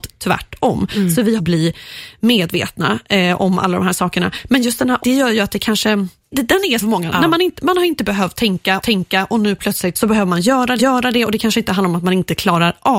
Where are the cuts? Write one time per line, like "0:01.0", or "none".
0:01.4
0:03.4
0:05.0
0:06.3
0:06.8
0:08.8
0:09.9
0:10.8